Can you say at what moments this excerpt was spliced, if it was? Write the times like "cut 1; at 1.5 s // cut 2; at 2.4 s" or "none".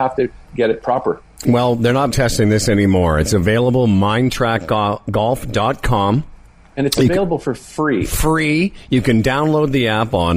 cut 1; at 2.1 s